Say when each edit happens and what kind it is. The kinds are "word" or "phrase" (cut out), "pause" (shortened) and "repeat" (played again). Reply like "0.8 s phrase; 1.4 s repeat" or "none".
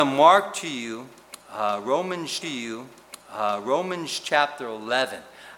2.4 s repeat